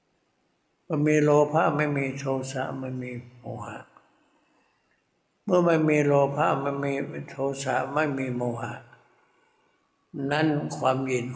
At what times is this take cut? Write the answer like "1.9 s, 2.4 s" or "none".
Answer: none